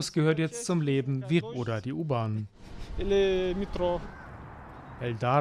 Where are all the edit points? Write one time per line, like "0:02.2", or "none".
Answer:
0:01.4